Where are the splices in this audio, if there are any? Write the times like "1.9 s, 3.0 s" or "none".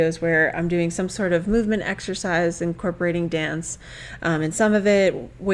none